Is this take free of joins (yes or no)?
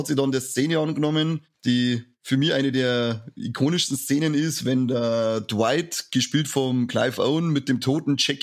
yes